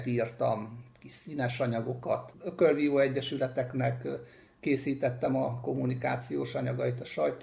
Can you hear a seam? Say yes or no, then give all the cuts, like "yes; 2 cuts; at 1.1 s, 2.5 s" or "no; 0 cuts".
no; 0 cuts